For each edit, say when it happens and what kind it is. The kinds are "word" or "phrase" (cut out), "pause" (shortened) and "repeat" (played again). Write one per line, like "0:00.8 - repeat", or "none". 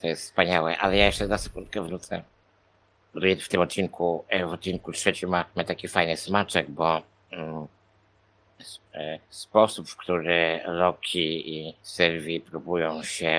none